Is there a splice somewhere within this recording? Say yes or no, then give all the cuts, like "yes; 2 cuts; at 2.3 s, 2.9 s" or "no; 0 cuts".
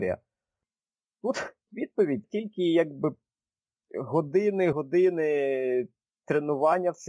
yes; 3 cuts; at 1.7 s, 2.2 s, 4.7 s